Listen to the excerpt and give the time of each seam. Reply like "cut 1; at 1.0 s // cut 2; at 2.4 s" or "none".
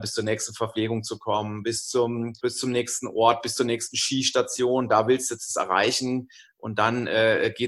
cut 1; at 2.4 s